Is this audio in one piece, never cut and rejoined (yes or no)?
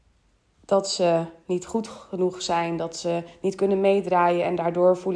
yes